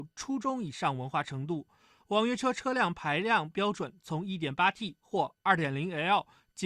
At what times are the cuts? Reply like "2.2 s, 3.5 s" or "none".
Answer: none